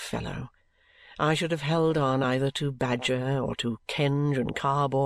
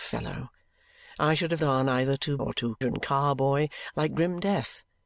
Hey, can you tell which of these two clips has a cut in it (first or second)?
second